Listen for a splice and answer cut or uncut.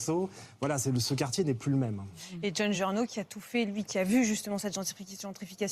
uncut